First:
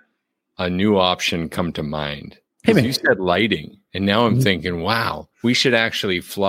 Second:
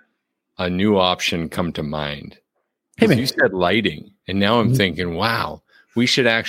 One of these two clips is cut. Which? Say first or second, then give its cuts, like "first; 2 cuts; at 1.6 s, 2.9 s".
first; 2 cuts; at 2.5 s, 5.3 s